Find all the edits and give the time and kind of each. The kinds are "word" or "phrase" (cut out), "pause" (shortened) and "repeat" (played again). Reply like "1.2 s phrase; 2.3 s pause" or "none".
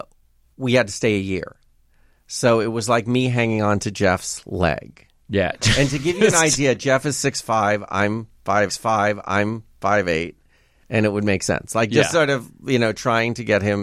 8.7 s repeat